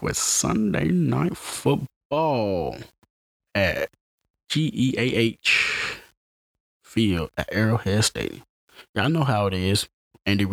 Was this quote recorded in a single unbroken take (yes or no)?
yes